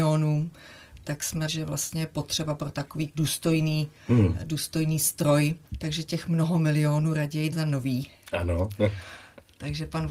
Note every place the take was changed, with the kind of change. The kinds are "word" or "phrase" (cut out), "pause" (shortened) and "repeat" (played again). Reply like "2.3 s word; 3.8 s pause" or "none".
1.5 s word; 3.1 s word; 5.7 s pause; 7.5 s word